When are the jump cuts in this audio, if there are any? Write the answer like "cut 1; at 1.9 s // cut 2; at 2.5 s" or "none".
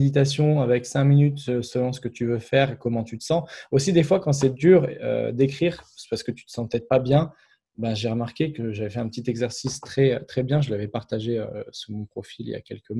none